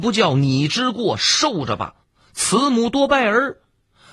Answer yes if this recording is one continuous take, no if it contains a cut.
no